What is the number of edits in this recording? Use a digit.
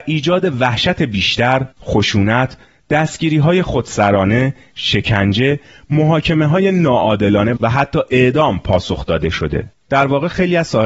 1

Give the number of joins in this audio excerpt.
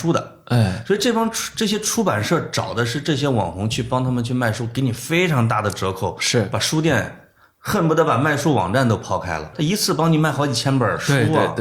1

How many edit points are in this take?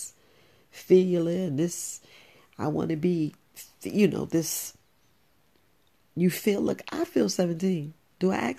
0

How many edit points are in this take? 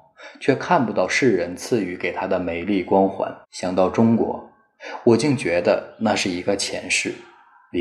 1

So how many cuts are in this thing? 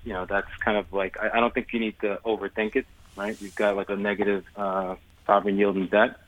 1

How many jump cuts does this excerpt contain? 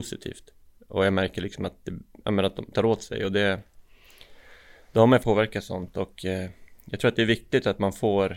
2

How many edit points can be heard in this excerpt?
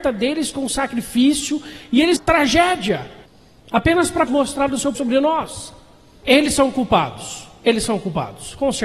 3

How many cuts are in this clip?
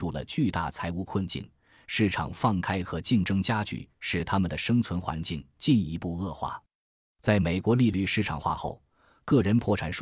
0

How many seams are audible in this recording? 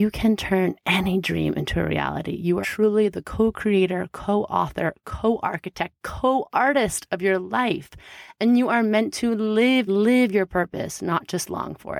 2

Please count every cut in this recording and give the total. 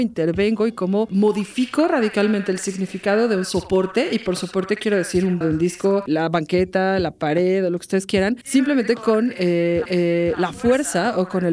3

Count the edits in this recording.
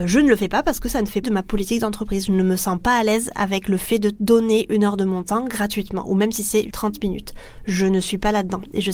2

